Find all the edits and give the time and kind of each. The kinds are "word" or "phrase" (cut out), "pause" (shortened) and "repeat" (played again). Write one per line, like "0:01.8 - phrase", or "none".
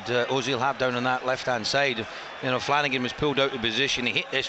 none